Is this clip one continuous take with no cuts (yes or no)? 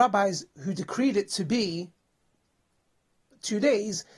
yes